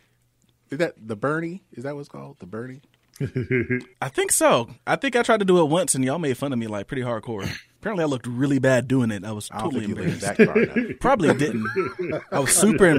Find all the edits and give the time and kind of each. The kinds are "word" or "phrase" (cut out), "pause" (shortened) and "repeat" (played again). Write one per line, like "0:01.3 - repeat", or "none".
0:03.9 - pause